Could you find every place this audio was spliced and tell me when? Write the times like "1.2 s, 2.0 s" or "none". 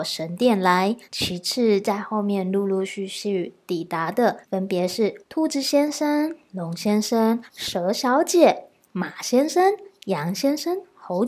1.0 s, 4.4 s, 5.2 s, 7.5 s